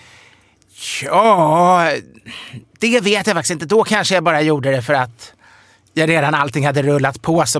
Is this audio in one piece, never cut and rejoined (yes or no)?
yes